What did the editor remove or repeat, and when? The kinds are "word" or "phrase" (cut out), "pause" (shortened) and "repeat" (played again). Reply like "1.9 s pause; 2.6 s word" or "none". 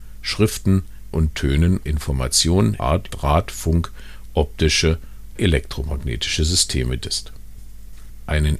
1.1 s word; 1.9 s word; 2.8 s word; 3.1 s word; 5.4 s word; 7.0 s word